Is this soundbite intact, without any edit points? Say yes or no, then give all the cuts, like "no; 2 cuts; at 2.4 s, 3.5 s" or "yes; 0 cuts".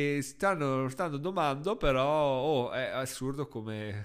yes; 0 cuts